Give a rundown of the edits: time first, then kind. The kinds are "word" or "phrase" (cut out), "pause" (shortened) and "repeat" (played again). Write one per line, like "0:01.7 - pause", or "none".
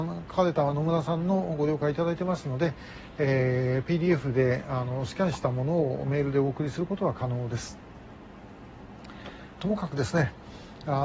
0:09.6 - phrase